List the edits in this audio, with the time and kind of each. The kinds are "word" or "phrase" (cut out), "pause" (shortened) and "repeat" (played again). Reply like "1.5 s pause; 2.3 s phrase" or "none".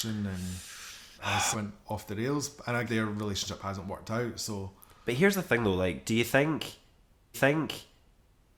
1.2 s word; 1.5 s word; 2.9 s word; 7.3 s repeat